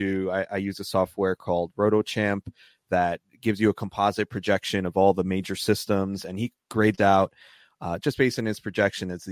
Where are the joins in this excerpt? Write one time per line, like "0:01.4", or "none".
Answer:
none